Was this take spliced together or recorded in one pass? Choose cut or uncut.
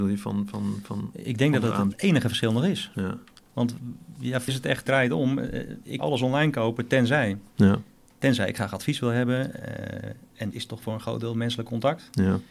cut